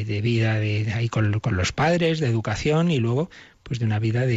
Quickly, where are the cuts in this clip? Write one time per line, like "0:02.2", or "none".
none